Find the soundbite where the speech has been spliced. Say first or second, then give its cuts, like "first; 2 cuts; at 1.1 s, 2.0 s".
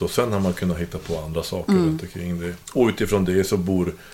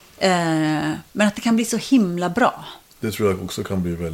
first; 1 cut; at 2.6 s